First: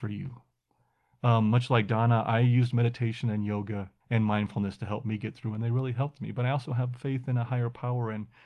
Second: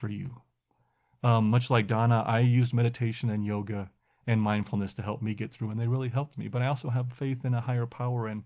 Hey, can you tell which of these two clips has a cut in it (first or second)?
first